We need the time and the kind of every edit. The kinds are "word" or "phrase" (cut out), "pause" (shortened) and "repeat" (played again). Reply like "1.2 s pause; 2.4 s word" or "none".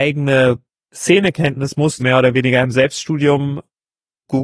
2.0 s phrase